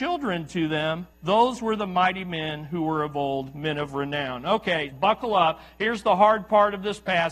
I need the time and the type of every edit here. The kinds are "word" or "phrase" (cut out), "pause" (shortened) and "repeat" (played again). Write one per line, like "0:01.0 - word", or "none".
0:01.1 - pause
0:04.9 - word